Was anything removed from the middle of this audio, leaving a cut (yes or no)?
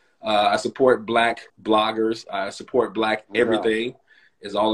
yes